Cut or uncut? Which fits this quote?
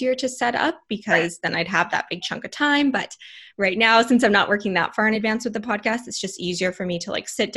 uncut